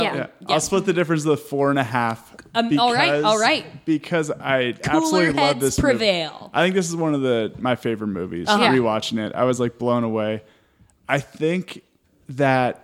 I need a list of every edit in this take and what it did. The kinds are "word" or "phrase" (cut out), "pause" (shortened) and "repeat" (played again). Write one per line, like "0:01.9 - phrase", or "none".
none